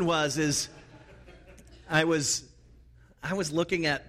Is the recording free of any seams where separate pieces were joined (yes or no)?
yes